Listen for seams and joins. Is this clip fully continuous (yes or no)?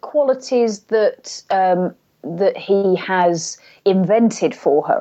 yes